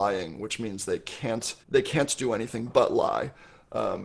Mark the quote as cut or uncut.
cut